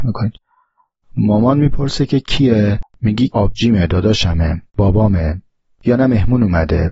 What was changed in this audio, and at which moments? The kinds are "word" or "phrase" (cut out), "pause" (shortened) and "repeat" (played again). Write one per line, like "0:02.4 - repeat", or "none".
0:03.3 - word
0:04.7 - pause